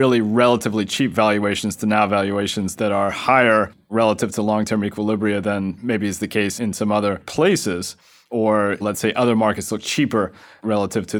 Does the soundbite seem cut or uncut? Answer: uncut